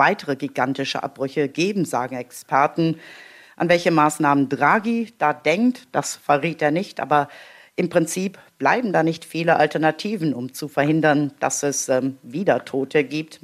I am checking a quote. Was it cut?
no; 0 cuts

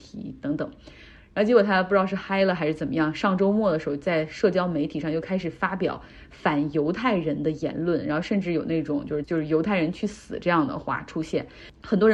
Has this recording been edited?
yes; 1 cut; at 9.2 s

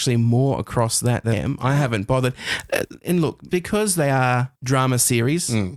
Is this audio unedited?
no; 3 cuts; at 1.3 s, 3.5 s, 4.6 s

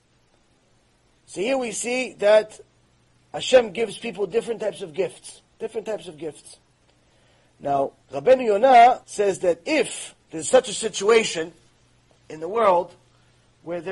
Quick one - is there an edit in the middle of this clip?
yes; 5 cuts; at 2.8 s, 5.5 s, 8.0 s, 9.0 s, 10.2 s

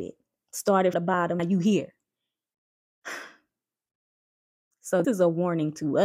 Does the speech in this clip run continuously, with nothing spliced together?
no; 3 cuts; at 0.9 s, 1.4 s, 5.0 s

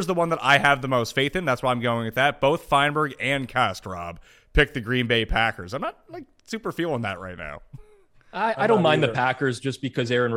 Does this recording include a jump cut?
no; 0 cuts

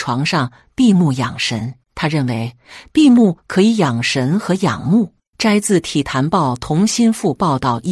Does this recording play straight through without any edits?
no; 2 cuts; at 1.8 s, 5.3 s

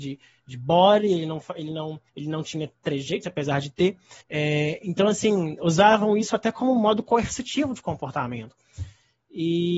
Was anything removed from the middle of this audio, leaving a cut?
yes; 2 cuts; at 2.1 s, 4.2 s

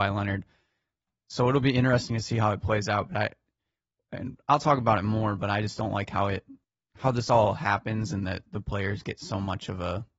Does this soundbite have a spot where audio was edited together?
yes; 1 cut; at 6.6 s

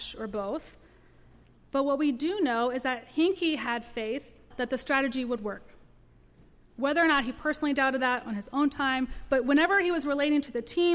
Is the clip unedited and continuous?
no; 1 cut; at 4.5 s

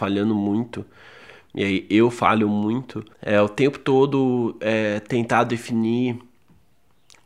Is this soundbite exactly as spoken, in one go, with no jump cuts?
no; 1 cut; at 3.1 s

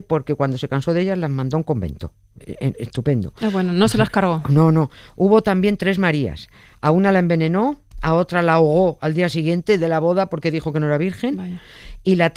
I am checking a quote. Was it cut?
no; 0 cuts

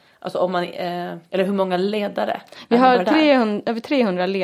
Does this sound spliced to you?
no; 0 cuts

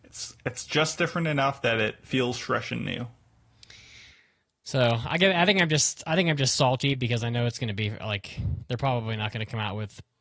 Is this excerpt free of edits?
yes; 0 cuts

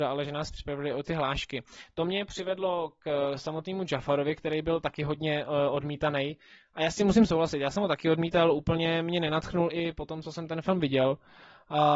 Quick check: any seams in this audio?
no; 0 cuts

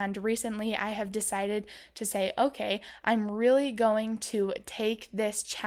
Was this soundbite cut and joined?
no; 0 cuts

